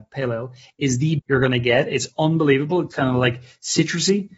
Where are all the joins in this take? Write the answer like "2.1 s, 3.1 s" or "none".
1.2 s, 2.9 s